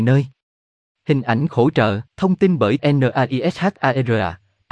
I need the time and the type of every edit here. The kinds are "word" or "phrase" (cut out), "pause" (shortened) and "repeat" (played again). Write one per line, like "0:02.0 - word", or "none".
0:01.5 - phrase
0:02.1 - pause
0:02.8 - word